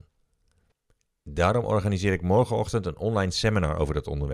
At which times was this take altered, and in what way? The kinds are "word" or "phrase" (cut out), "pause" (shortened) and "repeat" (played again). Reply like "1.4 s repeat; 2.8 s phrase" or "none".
none